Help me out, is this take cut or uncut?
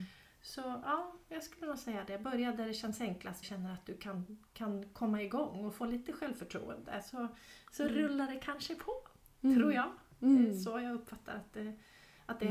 cut